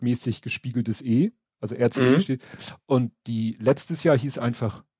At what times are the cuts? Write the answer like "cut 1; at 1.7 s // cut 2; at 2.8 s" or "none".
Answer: none